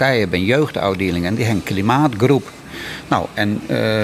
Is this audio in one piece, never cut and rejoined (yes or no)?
yes